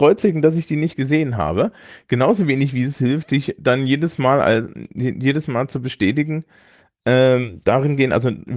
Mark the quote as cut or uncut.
uncut